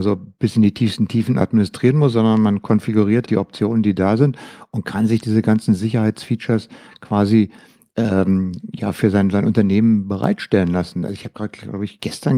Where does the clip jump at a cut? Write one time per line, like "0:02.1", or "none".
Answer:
0:03.3